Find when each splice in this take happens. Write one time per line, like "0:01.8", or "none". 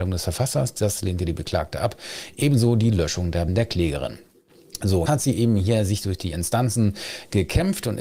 0:03.5
0:05.1